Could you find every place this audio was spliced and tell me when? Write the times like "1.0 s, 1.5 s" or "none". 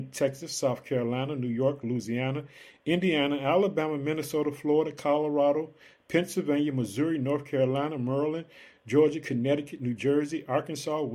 none